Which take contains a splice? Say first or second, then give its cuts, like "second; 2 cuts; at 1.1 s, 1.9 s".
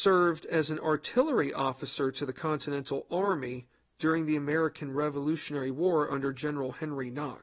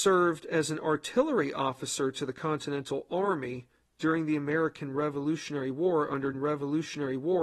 second; 1 cut; at 6.3 s